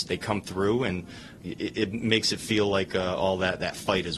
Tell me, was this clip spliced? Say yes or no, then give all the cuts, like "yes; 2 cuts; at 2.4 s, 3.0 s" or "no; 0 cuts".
no; 0 cuts